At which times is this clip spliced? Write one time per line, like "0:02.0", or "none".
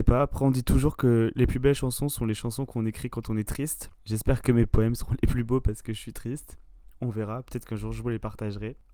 none

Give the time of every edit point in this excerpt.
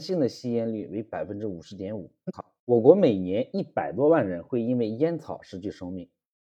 0:02.6

